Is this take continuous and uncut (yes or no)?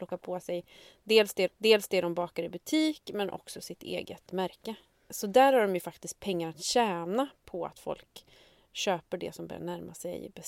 no